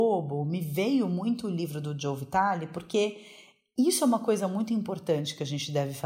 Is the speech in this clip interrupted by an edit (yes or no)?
no